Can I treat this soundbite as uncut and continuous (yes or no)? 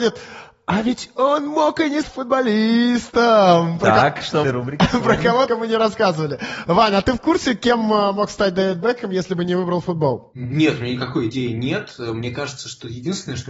no